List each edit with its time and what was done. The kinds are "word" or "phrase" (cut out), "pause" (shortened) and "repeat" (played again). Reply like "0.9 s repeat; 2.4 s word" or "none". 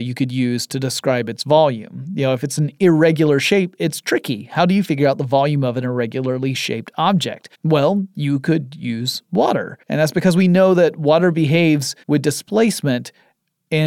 7.5 s pause; 9.8 s pause; 12.0 s pause